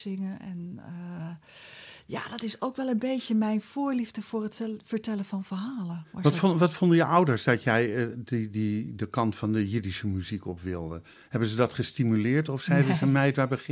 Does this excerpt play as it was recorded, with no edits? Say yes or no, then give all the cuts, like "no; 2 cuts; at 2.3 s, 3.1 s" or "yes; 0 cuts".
yes; 0 cuts